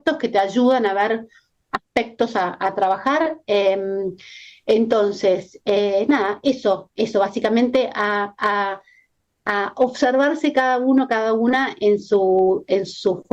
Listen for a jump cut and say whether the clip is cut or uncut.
uncut